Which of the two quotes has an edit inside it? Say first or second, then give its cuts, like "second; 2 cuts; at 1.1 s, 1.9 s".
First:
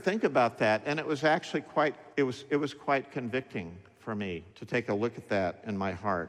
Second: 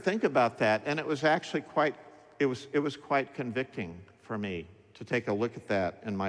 first; 2 cuts; at 2.1 s, 4.5 s